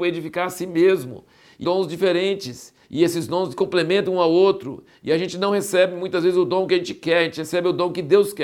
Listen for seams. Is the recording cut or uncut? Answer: cut